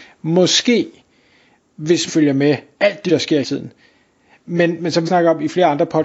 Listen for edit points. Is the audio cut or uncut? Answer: cut